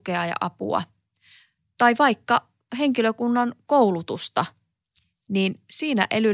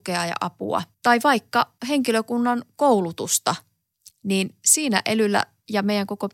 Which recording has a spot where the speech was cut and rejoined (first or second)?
second